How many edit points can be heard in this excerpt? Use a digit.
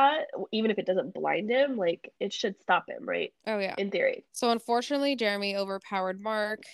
3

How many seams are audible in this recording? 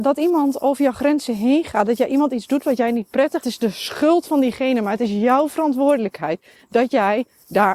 1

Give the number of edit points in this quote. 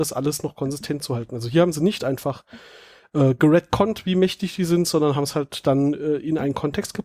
0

